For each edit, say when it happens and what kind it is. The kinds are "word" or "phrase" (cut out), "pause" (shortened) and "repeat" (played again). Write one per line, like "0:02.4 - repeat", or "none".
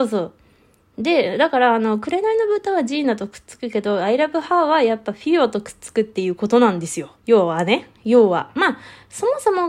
0:07.2 - pause